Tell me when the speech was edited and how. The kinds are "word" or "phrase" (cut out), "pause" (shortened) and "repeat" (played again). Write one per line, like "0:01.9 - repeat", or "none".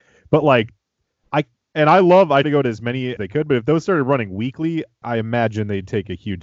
0:02.4 - word
0:03.2 - word
0:05.0 - word